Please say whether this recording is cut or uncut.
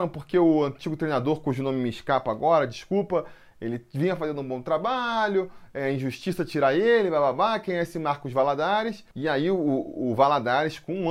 uncut